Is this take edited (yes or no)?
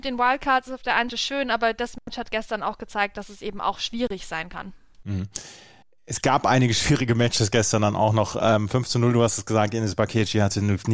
yes